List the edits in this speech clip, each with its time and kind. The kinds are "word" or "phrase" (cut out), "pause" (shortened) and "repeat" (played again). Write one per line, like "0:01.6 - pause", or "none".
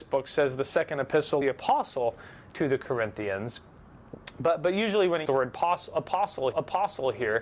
0:01.4 - phrase
0:05.3 - word
0:06.5 - repeat